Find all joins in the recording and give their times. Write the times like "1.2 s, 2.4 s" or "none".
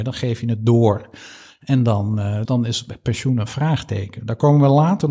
2.4 s